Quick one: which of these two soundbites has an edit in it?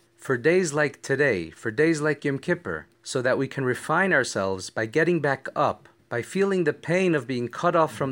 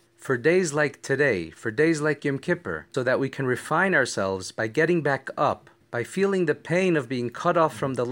second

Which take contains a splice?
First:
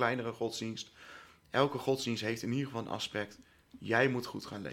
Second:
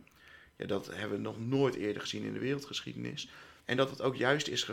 second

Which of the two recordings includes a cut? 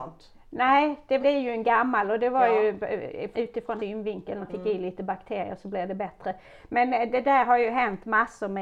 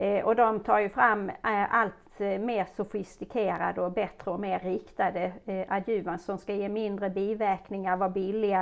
first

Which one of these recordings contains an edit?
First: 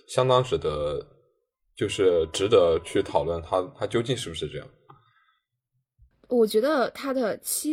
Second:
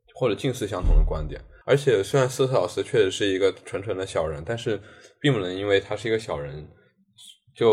second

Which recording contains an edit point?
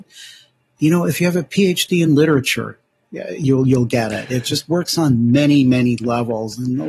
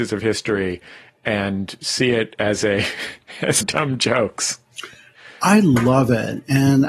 second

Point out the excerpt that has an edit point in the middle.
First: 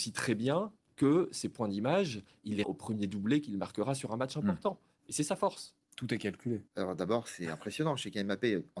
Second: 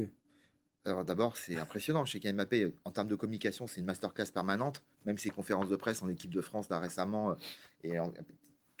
first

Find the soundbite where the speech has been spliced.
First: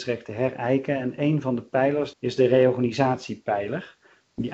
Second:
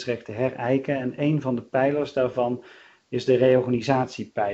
first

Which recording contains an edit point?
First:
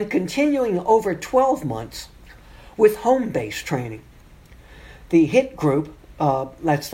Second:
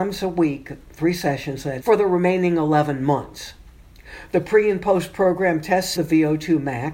second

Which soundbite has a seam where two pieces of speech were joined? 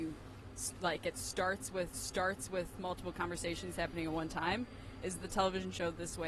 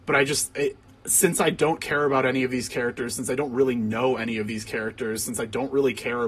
first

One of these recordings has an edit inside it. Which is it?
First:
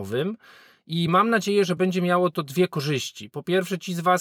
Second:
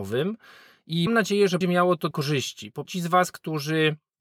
second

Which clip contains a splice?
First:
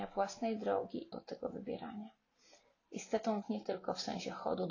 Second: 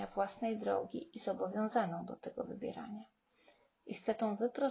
first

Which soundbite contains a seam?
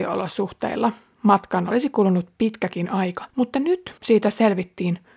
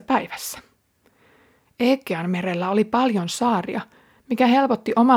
first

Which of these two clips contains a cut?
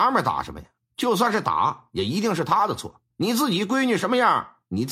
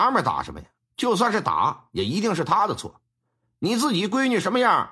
first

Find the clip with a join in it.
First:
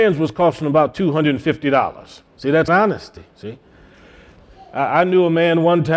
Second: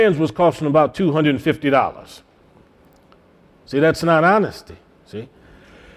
first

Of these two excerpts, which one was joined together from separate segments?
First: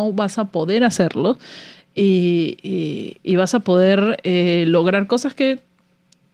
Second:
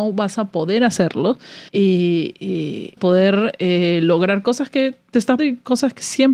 second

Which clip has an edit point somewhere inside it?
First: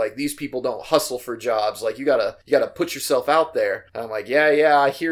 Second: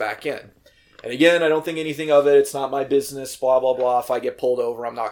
first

